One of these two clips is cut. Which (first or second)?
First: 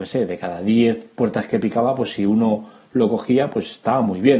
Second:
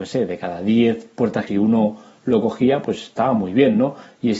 second